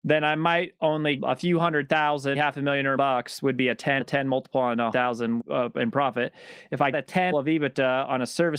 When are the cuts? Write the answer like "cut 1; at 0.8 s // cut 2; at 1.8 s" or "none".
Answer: cut 1; at 1.2 s // cut 2; at 2.3 s // cut 3; at 3.0 s // cut 4; at 4.0 s // cut 5; at 4.9 s // cut 6; at 5.4 s // cut 7; at 6.9 s // cut 8; at 7.3 s